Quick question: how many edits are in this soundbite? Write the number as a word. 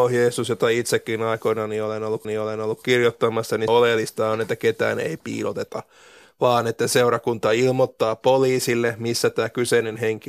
two